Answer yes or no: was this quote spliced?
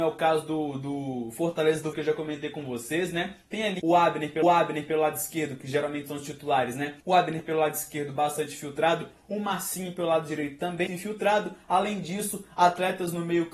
yes